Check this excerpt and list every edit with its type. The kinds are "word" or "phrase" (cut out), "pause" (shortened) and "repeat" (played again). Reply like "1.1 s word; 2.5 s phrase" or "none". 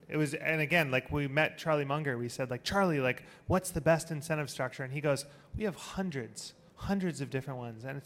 none